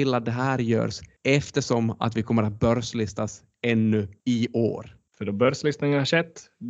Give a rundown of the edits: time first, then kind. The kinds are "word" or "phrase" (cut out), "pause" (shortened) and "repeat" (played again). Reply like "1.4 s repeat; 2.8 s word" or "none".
none